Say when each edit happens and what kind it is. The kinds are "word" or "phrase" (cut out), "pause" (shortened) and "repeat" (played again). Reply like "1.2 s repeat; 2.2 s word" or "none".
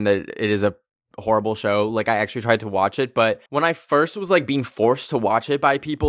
3.5 s pause